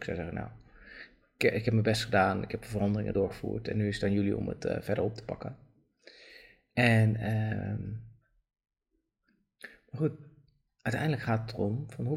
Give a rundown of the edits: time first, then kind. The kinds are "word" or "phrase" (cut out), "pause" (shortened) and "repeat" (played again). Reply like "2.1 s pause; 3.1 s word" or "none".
none